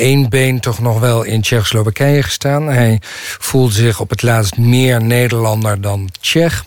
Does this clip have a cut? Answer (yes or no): no